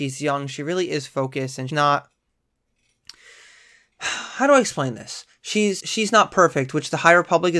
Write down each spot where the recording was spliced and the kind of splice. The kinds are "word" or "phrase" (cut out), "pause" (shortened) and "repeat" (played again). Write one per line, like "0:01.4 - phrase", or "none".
0:01.7 - word
0:05.8 - word